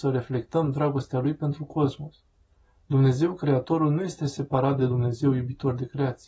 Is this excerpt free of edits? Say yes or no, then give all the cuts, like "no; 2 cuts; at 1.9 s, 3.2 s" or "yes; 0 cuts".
yes; 0 cuts